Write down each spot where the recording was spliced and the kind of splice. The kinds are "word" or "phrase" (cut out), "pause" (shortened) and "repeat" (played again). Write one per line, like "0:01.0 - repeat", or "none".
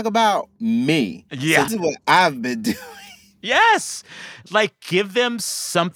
0:01.7 - word

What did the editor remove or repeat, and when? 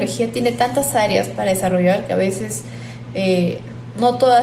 none

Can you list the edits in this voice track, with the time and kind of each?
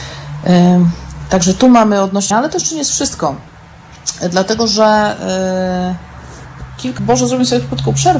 0:02.3 - word
0:07.0 - phrase

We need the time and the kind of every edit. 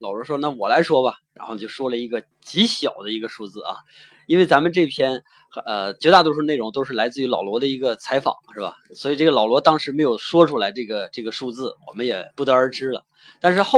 0:02.3 - pause
0:12.3 - pause

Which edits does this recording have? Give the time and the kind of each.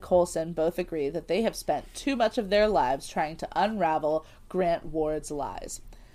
none

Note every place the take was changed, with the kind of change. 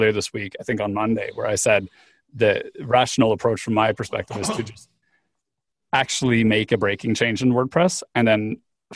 none

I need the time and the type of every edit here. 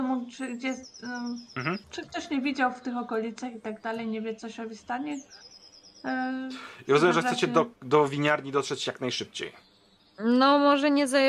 0:01.8 - pause
0:10.0 - pause

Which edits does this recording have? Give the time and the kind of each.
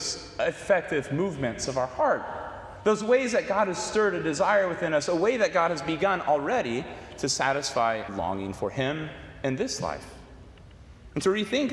0:08.1 - word

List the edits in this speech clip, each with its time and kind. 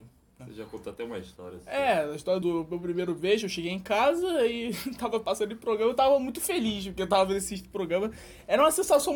0:02.4 - word

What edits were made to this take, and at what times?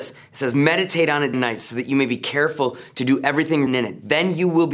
0:01.3 - word
0:03.7 - word

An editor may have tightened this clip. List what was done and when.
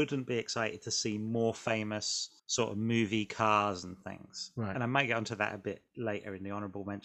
0:02.4 - pause

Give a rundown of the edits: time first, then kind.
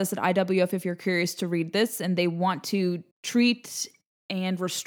0:03.1 - pause

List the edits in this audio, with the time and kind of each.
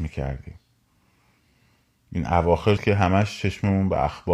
0:02.8 - phrase

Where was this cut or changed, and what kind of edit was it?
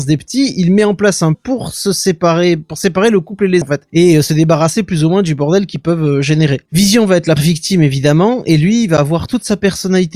0:01.3 - word
0:03.6 - word
0:07.4 - word

